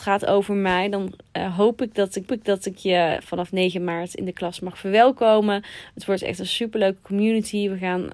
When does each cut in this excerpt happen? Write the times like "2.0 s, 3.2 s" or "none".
2.3 s

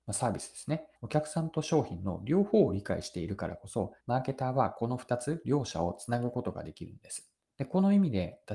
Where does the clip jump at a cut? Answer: 0.9 s, 4.0 s, 7.5 s

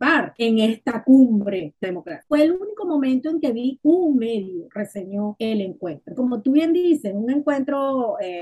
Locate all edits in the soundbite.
1.8 s, 3.8 s, 6.2 s

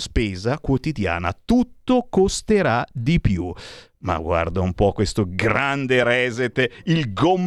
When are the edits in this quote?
none

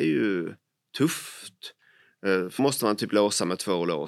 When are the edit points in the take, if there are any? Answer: 2.6 s

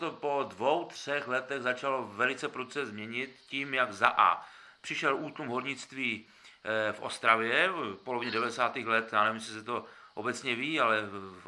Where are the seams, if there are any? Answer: none

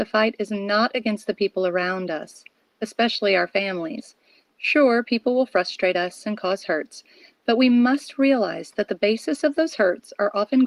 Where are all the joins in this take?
none

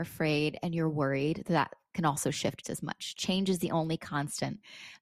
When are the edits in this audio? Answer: 2.6 s

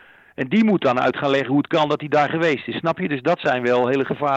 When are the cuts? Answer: none

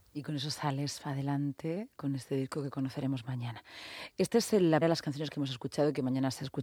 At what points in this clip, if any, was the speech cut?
4.8 s

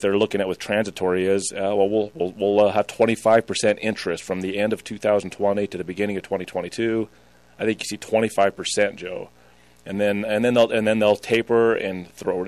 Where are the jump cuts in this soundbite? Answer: none

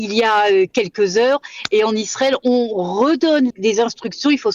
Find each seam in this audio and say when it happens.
3.5 s

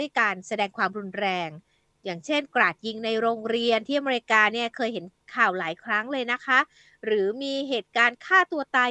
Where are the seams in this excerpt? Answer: none

